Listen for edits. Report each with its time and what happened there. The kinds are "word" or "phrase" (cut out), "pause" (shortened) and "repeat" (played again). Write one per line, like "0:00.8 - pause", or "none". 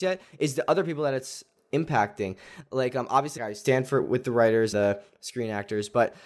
0:03.4 - word
0:04.7 - word